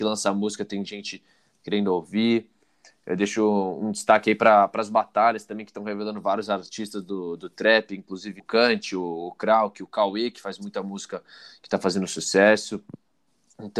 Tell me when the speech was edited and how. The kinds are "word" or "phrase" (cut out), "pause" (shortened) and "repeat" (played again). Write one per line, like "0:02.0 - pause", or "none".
0:08.4 - word

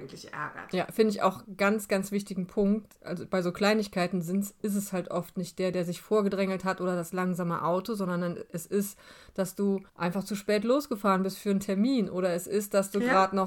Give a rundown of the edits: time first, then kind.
0:09.9 - pause

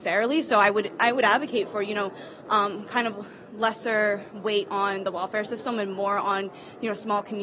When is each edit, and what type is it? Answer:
none

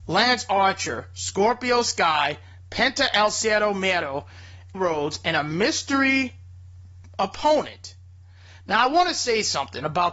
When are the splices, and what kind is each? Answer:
0:04.7 - word

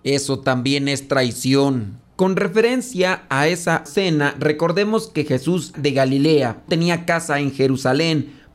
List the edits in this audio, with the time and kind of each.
0:03.9 - word
0:05.7 - word
0:06.7 - word

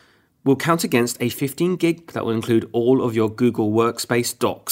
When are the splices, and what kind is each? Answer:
0:01.3 - word
0:02.1 - word

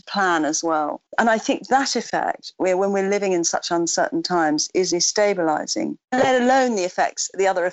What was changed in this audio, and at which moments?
0:01.1 - pause
0:04.9 - word

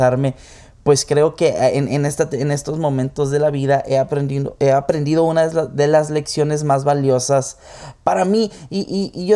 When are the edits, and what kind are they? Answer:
none

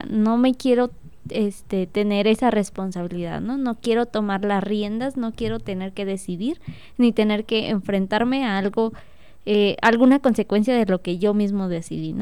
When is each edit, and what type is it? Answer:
none

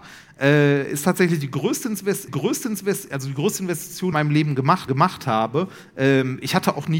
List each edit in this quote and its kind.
0:02.3 - repeat
0:04.1 - phrase
0:04.9 - repeat

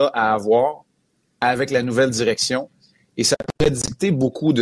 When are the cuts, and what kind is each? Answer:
none

